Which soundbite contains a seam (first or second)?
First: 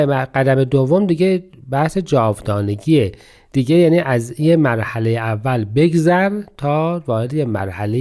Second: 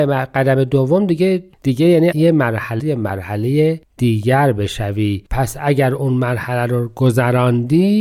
second